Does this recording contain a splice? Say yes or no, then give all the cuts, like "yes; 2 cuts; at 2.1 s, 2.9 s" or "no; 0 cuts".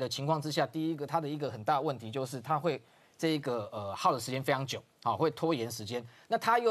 no; 0 cuts